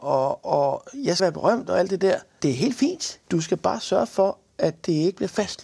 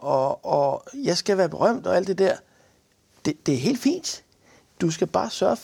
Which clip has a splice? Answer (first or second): first